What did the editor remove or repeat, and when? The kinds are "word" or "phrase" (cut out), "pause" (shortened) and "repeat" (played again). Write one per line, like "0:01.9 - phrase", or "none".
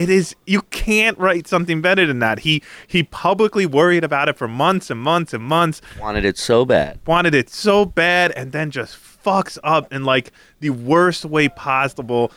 none